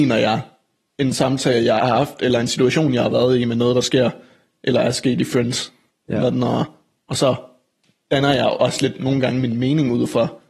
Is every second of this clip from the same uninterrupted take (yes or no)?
yes